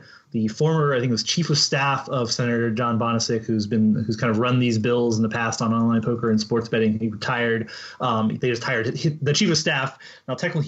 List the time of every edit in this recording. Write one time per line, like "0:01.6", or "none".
none